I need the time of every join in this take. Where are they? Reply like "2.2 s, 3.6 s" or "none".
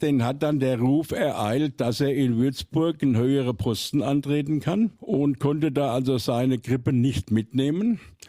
5.0 s